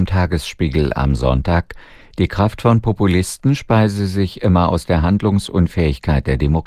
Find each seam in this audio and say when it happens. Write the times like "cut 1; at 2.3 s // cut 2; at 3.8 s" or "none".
none